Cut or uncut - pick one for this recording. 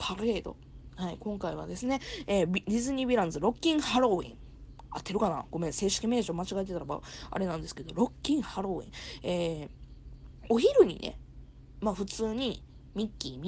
uncut